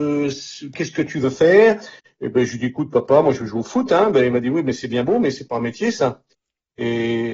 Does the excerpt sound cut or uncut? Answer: uncut